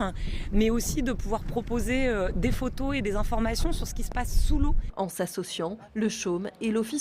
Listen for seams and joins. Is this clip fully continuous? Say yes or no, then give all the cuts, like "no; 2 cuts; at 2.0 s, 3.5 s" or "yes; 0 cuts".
yes; 0 cuts